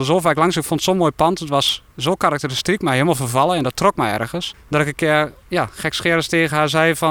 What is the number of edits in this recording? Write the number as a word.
one